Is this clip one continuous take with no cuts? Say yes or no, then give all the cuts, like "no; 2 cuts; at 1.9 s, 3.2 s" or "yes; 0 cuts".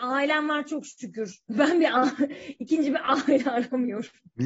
yes; 0 cuts